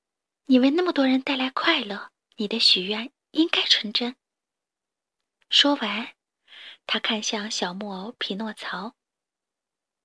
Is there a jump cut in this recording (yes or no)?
yes